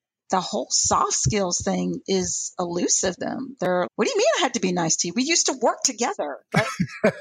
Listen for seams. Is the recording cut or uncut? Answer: cut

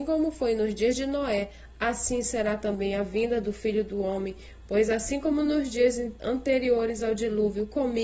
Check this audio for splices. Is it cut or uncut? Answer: uncut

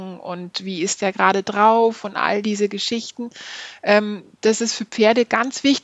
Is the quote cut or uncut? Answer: uncut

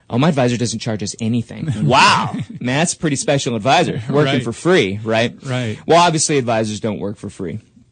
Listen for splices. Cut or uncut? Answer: uncut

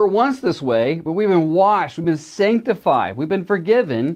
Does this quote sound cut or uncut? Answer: uncut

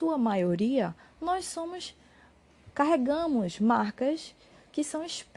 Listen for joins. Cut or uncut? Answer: uncut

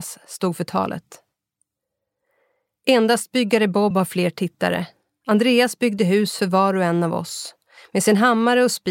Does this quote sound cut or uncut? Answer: uncut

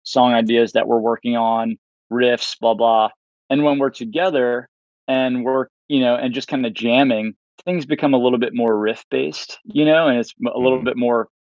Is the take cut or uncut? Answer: cut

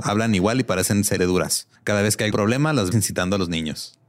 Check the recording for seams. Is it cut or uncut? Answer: cut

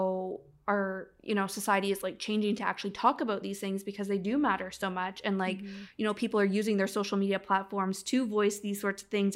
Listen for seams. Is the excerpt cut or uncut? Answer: uncut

